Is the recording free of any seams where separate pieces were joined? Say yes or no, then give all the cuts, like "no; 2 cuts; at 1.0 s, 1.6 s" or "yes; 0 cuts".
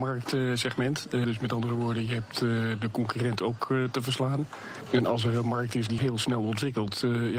no; 2 cuts; at 1.2 s, 6.0 s